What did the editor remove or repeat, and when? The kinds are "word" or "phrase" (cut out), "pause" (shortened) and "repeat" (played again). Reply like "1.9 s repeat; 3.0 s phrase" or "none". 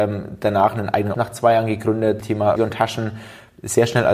1.1 s word; 2.2 s word; 2.6 s word